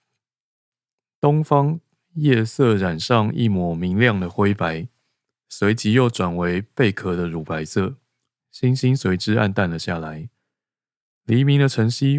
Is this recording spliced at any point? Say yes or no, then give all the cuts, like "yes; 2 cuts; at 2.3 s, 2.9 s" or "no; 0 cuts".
no; 0 cuts